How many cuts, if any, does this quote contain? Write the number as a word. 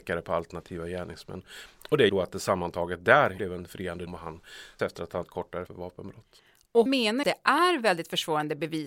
eight